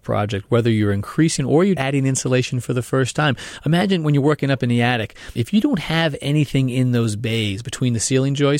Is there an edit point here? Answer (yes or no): yes